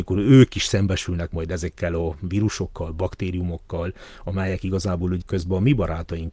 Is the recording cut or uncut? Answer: cut